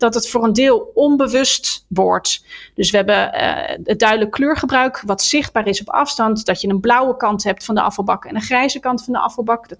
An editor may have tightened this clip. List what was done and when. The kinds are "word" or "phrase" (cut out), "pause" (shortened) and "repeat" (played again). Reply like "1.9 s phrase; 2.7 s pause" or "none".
none